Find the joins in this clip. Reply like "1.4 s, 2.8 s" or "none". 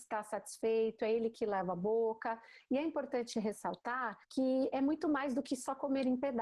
4.2 s